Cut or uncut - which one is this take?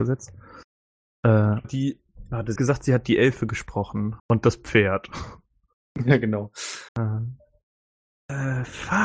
cut